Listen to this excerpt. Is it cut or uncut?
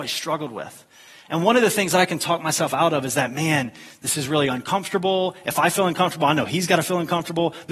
uncut